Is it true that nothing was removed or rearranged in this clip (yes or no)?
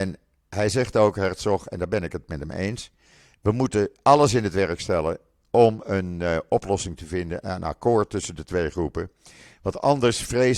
yes